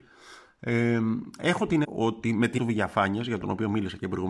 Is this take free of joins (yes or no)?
no